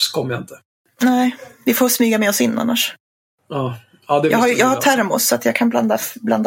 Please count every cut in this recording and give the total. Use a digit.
0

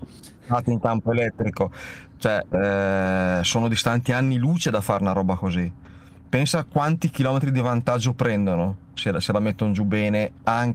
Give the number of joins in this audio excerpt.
0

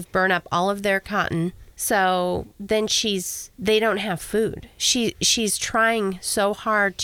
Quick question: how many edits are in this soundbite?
2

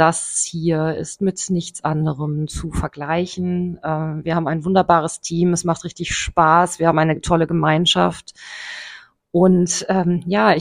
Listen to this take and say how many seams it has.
0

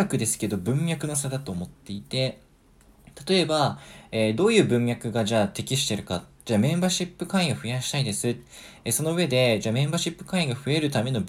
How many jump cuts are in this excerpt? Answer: 1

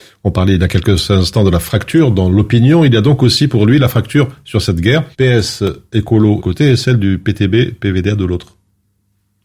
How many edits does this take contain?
2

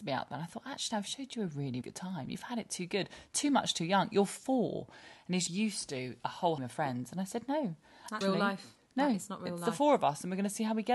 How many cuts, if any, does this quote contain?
4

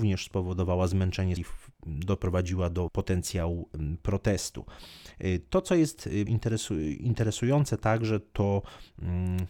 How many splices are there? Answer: 4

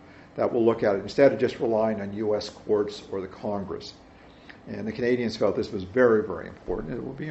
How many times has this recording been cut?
0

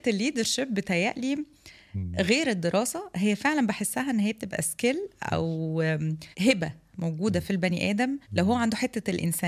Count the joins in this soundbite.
2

